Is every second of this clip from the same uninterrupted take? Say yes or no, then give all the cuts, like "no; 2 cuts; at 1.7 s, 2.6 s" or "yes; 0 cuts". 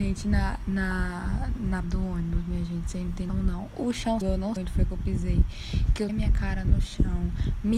no; 5 cuts; at 1.8 s, 3.3 s, 4.2 s, 4.6 s, 6.1 s